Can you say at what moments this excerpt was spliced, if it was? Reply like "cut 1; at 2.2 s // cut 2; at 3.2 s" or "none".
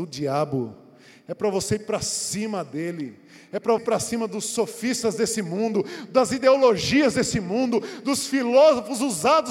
cut 1; at 3.8 s